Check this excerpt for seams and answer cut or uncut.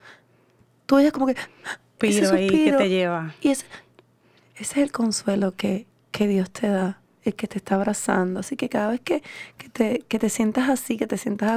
cut